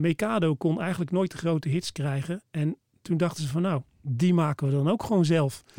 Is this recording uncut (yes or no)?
yes